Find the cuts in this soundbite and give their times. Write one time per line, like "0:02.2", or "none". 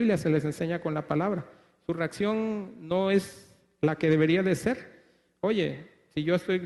none